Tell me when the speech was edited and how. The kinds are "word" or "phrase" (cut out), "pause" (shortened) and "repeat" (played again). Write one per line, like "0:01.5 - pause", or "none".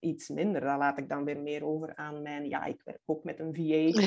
none